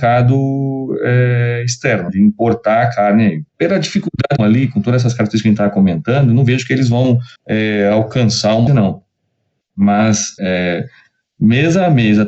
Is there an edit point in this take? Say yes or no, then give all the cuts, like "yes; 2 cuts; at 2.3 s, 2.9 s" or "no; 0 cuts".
yes; 6 cuts; at 2.1 s, 3.5 s, 4.4 s, 7.4 s, 8.7 s, 10.4 s